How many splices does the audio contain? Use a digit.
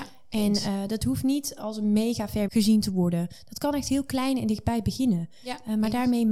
1